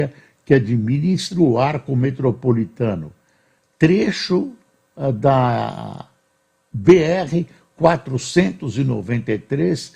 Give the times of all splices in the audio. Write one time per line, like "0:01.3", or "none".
none